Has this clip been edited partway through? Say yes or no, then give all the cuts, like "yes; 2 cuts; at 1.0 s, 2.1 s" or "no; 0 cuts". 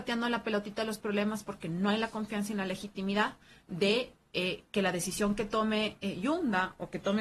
no; 0 cuts